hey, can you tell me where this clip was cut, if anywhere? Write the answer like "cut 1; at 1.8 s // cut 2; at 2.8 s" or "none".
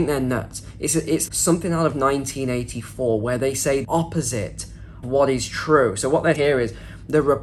cut 1; at 1.3 s // cut 2; at 3.8 s // cut 3; at 5.0 s // cut 4; at 6.3 s